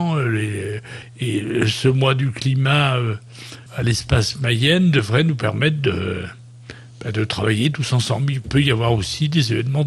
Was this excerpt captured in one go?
no; 1 cut; at 3.7 s

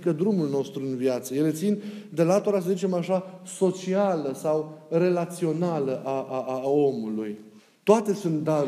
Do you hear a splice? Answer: yes; 1 cut; at 7.6 s

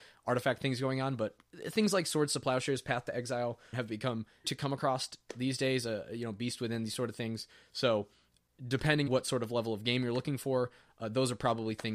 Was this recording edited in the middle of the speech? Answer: yes; 3 cuts; at 3.7 s, 4.4 s, 9.1 s

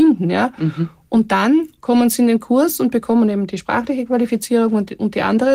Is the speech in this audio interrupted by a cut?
no; 0 cuts

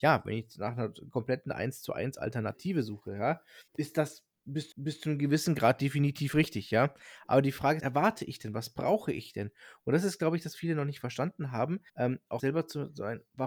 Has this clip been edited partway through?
yes; 6 cuts; at 3.7 s, 4.7 s, 7.8 s, 10.5 s, 11.9 s, 12.4 s

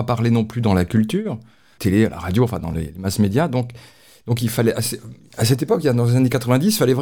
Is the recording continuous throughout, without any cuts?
yes; 0 cuts

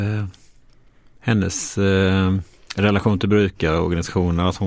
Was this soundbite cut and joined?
no; 0 cuts

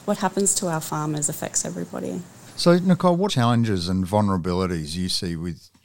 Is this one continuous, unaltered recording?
no; 1 cut; at 3.3 s

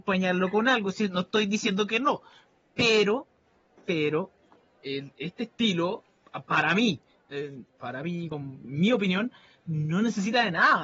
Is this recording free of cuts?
no; 1 cut; at 7.1 s

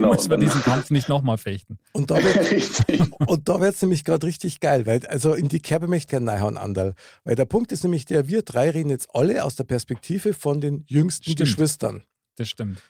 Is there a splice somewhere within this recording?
yes; 1 cut; at 6.1 s

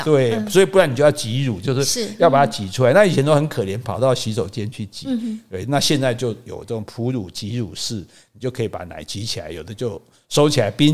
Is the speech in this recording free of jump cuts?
yes; 0 cuts

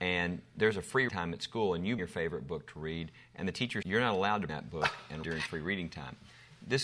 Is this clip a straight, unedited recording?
no; 5 cuts; at 1.1 s, 2.0 s, 3.8 s, 4.5 s, 5.2 s

